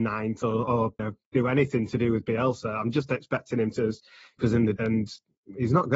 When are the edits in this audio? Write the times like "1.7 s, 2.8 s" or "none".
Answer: 1.0 s, 4.4 s, 4.8 s